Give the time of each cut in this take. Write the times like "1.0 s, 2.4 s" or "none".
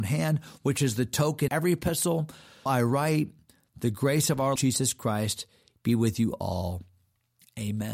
1.5 s, 2.7 s, 4.6 s